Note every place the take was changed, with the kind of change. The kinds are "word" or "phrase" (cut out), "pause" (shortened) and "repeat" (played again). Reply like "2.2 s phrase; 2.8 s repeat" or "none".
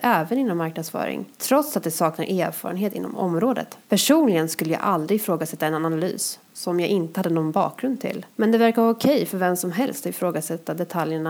1.3 s pause; 3.8 s pause; 8.3 s pause